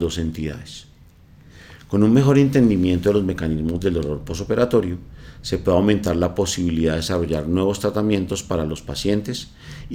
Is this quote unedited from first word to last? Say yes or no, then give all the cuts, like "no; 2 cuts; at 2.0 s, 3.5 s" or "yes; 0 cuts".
yes; 0 cuts